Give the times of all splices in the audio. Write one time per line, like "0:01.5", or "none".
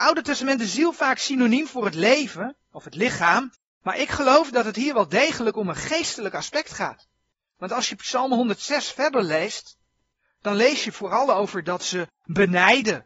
none